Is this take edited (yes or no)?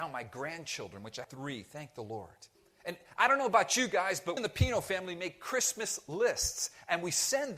yes